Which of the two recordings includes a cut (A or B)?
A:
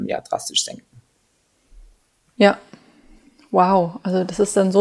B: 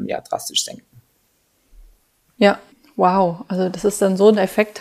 B